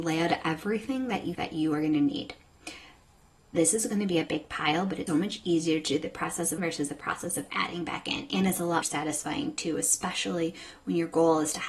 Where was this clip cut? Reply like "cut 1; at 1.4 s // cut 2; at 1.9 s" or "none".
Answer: cut 1; at 1.3 s // cut 2; at 5.1 s // cut 3; at 6.6 s // cut 4; at 8.8 s